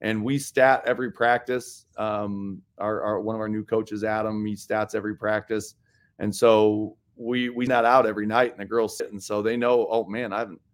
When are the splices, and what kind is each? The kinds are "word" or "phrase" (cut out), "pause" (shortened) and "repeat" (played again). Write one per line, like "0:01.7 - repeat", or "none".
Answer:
0:07.7 - word
0:09.0 - word